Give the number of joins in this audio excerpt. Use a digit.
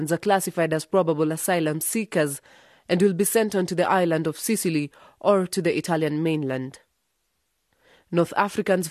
0